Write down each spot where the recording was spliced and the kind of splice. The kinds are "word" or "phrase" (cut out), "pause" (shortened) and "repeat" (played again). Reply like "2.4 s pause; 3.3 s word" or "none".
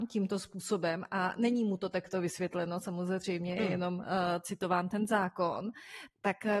none